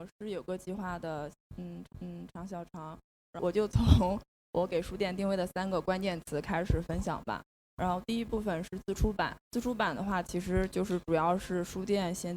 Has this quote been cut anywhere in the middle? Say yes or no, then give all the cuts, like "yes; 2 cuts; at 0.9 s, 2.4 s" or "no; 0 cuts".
yes; 2 cuts; at 1.9 s, 9.4 s